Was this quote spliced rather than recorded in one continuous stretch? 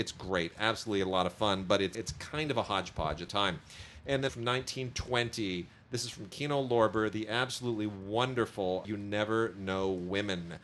yes; 4 cuts; at 1.9 s, 3.3 s, 4.3 s, 8.8 s

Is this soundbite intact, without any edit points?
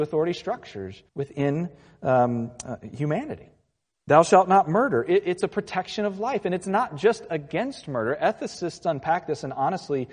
no; 2 cuts; at 1.1 s, 3.9 s

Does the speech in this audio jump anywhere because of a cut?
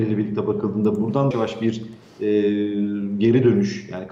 yes; 1 cut; at 1.3 s

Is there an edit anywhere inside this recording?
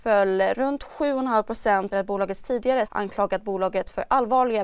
yes; 2 cuts; at 1.9 s, 2.8 s

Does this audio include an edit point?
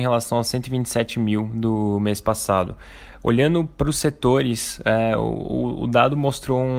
no; 0 cuts

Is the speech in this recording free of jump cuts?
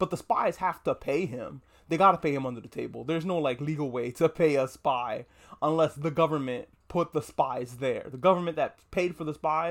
yes; 0 cuts

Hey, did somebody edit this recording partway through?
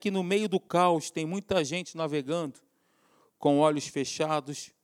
no; 0 cuts

